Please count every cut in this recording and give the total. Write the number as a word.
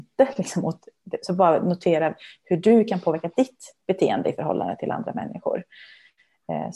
zero